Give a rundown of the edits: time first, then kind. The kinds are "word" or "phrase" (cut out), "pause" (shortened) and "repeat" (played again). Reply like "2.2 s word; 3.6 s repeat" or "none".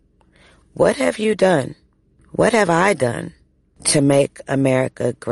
none